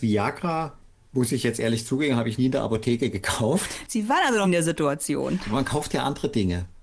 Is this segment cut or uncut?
cut